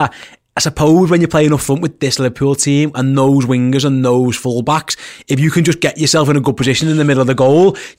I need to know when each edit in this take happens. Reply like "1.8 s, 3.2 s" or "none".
none